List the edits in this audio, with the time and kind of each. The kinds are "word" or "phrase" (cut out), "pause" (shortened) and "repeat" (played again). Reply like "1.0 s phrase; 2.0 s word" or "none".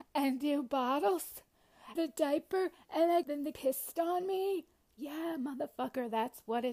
2.0 s word; 3.2 s word; 3.5 s word